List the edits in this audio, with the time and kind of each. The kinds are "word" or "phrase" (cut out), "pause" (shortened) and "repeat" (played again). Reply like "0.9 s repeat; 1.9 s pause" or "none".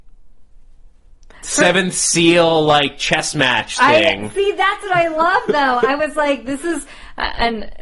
none